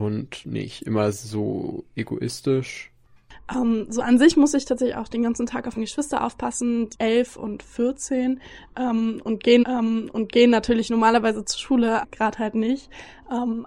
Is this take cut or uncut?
cut